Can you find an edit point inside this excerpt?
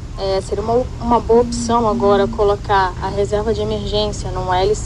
no; 0 cuts

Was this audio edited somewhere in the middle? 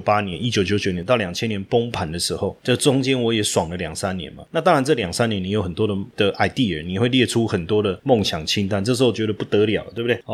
no; 0 cuts

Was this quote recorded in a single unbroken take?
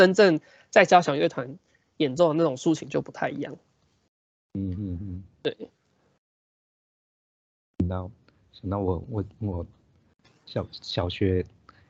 yes; 0 cuts

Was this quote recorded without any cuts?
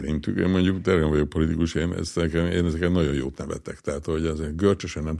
yes; 0 cuts

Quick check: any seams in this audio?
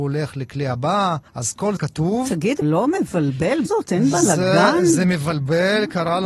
yes; 4 cuts; at 1.3 s, 1.8 s, 2.6 s, 3.7 s

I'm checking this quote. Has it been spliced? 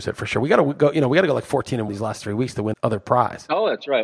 yes; 2 cuts; at 1.9 s, 2.7 s

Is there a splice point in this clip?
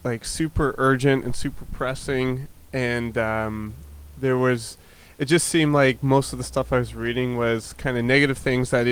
no; 0 cuts

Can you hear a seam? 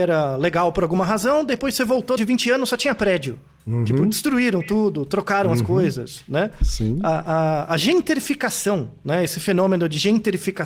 yes; 1 cut; at 2.2 s

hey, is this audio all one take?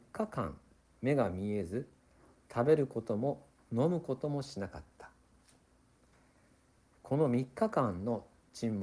yes; 0 cuts

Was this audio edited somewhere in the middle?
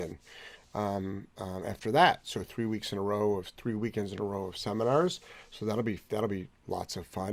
no; 0 cuts

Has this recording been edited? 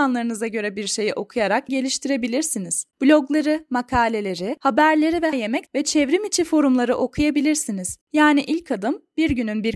yes; 5 cuts; at 1.7 s, 2.9 s, 5.3 s, 5.7 s, 8.0 s

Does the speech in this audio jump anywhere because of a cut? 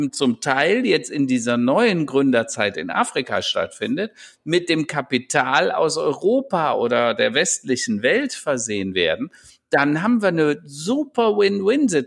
no; 0 cuts

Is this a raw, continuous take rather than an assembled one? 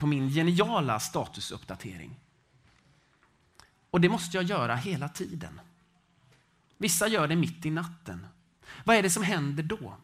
yes; 0 cuts

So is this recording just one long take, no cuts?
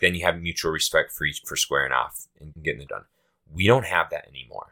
no; 3 cuts; at 1.4 s, 2.5 s, 2.9 s

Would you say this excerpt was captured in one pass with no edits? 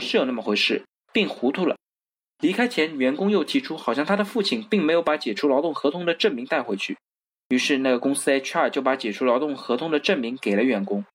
yes; 0 cuts

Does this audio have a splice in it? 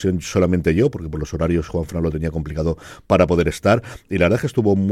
no; 0 cuts

